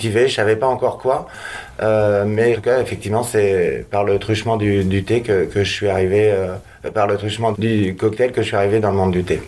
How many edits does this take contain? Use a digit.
2